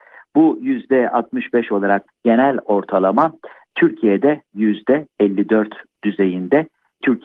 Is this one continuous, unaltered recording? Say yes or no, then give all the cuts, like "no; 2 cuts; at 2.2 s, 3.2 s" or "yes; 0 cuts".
no; 1 cut; at 2.1 s